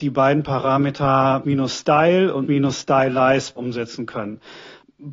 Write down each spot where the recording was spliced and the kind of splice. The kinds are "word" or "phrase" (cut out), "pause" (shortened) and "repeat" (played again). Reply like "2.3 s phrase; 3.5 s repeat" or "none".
1.4 s word; 2.5 s word; 3.6 s word